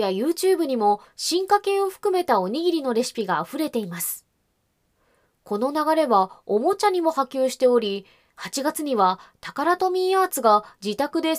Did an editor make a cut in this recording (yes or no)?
no